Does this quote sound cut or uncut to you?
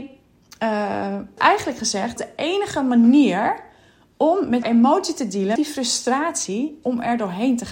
cut